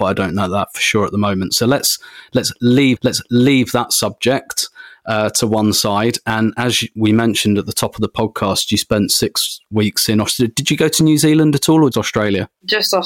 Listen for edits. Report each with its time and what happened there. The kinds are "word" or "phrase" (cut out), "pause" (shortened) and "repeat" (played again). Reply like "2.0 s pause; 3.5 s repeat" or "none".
3.0 s repeat; 11.9 s word

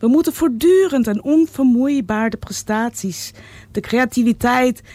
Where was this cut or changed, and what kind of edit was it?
none

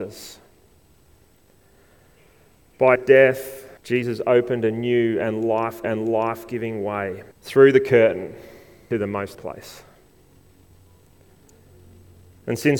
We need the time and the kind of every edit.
3.0 s word; 3.8 s pause; 5.8 s repeat; 7.3 s pause; 8.9 s word; 9.3 s word

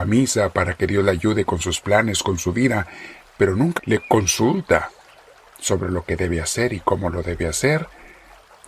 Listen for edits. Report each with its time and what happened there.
3.8 s word

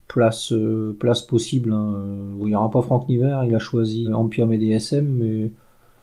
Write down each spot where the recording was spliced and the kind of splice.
4.0 s word

